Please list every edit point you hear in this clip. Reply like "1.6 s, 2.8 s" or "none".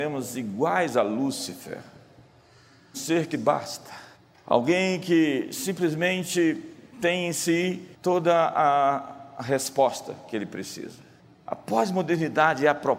2.9 s, 3.3 s, 4.1 s, 7.9 s, 11.2 s